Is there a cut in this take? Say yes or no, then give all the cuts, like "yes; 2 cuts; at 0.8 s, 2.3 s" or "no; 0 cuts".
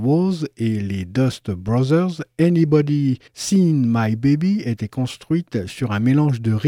yes; 1 cut; at 3.3 s